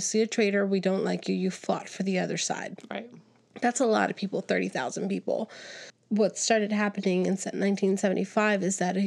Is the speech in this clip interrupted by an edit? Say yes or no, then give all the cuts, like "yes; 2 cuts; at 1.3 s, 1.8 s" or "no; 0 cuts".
no; 0 cuts